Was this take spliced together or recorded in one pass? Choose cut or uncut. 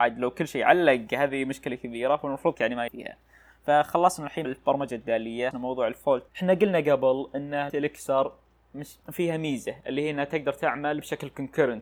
cut